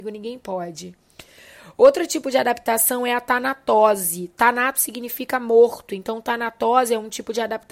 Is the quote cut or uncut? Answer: uncut